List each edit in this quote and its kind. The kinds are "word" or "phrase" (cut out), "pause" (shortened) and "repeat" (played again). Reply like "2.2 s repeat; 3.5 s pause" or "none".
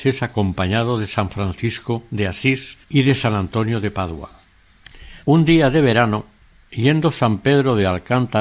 2.8 s pause; 5.2 s pause